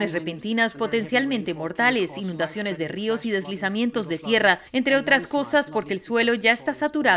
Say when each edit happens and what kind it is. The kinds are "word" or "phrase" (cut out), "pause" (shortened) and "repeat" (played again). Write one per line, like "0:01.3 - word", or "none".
none